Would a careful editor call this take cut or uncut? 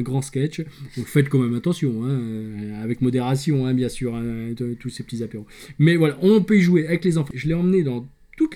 uncut